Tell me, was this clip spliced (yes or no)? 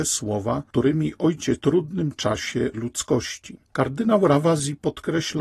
yes